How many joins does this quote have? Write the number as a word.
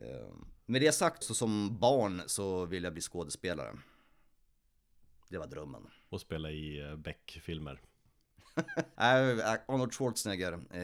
two